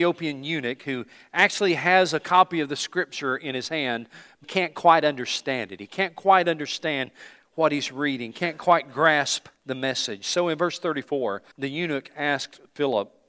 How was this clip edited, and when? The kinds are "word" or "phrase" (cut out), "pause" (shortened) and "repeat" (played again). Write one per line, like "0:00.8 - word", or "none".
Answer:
0:04.4 - word
0:09.6 - pause
0:11.5 - pause